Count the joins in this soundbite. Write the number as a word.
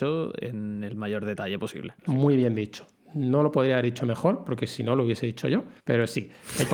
two